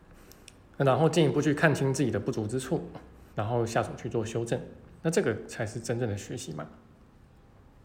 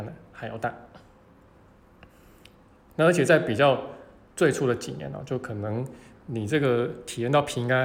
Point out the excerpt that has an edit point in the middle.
first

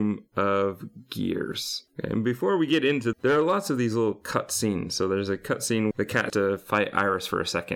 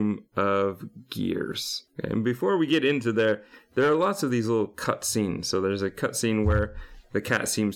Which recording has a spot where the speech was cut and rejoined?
first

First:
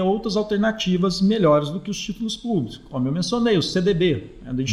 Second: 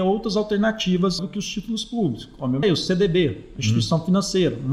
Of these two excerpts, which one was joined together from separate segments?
second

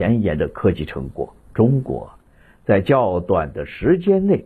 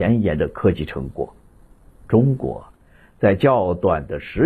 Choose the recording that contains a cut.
first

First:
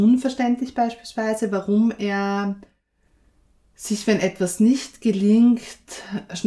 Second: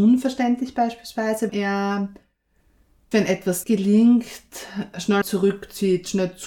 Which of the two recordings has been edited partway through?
second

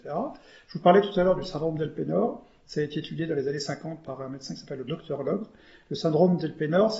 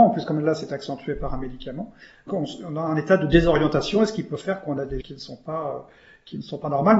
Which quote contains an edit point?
second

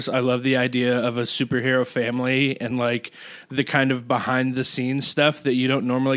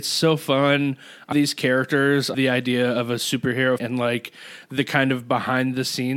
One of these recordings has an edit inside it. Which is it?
second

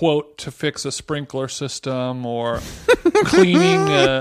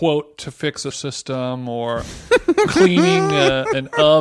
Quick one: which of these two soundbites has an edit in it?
second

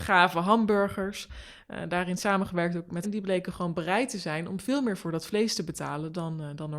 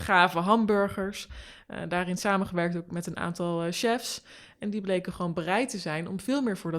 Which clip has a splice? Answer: first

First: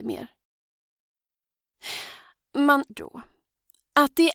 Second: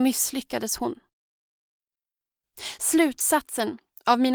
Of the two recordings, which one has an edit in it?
first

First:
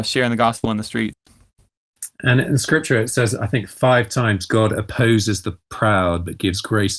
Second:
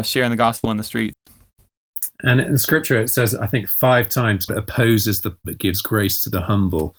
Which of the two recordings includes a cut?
second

